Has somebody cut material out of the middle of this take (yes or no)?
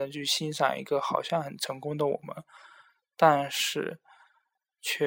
no